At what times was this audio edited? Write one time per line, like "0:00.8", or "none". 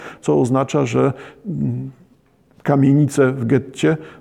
none